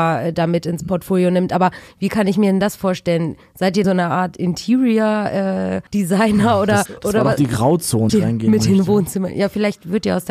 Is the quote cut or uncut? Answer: cut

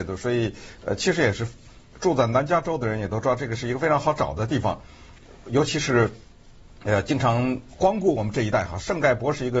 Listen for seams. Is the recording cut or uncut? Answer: uncut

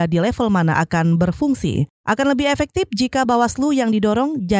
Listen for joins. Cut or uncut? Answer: uncut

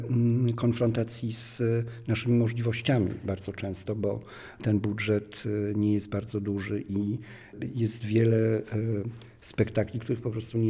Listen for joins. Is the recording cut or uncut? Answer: uncut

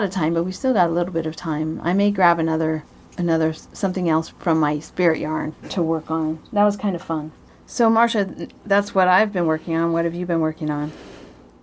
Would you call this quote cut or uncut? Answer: cut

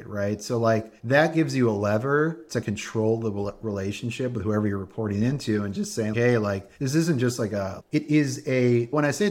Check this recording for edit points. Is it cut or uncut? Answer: cut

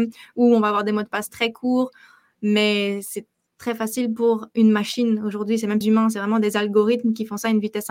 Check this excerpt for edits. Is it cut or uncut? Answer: cut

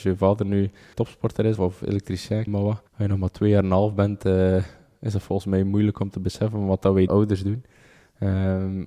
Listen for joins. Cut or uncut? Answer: cut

